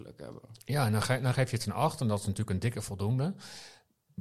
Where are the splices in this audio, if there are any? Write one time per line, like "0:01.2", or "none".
none